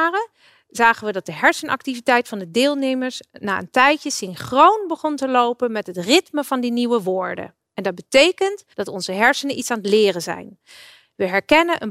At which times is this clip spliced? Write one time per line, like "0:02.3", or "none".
0:08.7